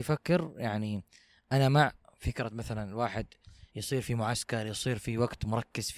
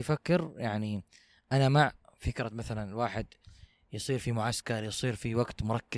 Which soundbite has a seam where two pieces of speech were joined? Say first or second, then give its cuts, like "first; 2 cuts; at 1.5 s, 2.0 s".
first; 1 cut; at 3.7 s